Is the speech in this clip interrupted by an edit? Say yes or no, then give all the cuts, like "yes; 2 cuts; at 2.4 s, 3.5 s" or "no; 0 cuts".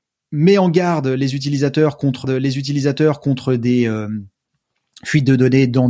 yes; 1 cut; at 2.2 s